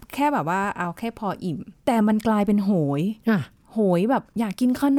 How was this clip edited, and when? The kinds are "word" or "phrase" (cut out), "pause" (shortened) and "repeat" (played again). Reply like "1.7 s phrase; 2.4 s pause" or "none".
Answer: 1.8 s pause; 3.2 s pause